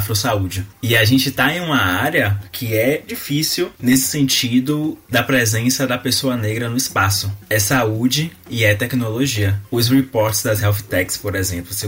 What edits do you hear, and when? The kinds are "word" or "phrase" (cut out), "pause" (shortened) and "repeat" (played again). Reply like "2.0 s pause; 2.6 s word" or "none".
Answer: 3.1 s word